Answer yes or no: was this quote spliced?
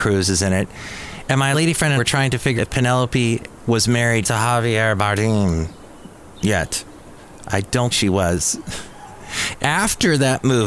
yes